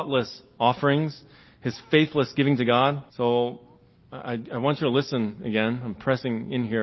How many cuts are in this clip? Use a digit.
1